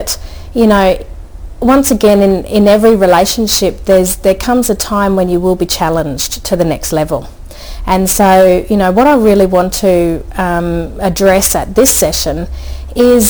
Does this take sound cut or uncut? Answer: uncut